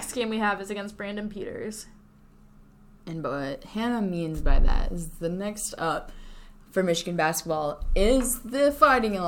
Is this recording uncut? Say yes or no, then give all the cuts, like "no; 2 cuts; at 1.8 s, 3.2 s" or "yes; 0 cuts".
yes; 0 cuts